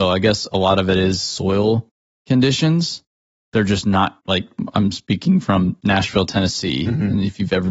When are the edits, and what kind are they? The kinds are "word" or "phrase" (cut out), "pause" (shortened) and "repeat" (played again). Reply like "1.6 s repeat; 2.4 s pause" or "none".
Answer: none